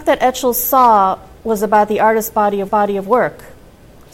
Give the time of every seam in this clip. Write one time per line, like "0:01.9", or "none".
0:01.4
0:02.7